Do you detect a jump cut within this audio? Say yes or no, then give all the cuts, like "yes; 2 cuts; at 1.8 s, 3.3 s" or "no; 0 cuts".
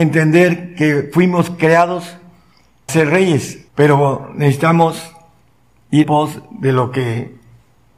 yes; 3 cuts; at 2.9 s, 3.7 s, 6.0 s